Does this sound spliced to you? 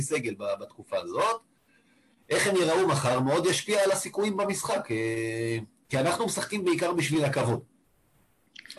no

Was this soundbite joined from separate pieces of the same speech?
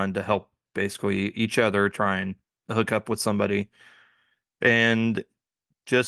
no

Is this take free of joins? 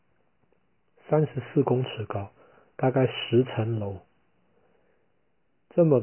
yes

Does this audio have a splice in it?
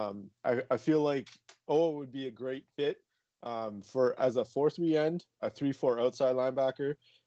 yes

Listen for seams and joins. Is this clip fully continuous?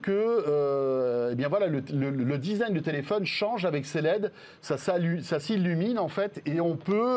yes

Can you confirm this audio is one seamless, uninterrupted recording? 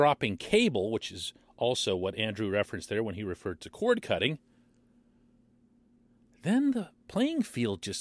yes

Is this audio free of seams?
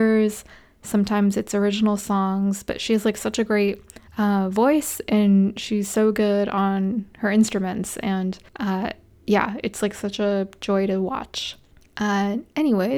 no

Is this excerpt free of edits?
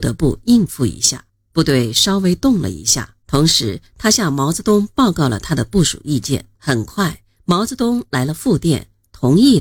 no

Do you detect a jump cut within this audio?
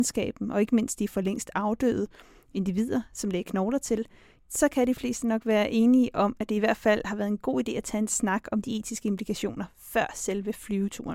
no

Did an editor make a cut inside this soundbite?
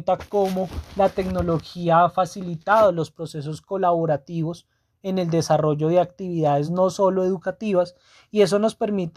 no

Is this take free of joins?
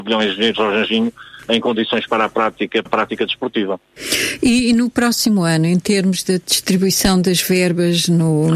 no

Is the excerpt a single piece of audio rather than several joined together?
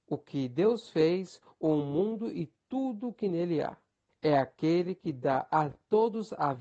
no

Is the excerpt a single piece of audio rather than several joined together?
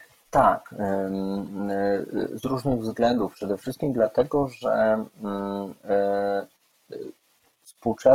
yes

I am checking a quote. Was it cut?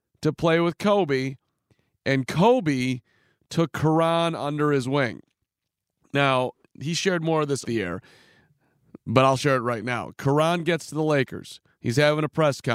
yes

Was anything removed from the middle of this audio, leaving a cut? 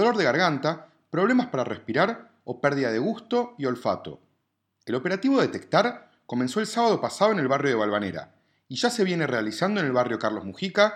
no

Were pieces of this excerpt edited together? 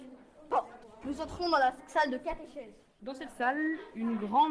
no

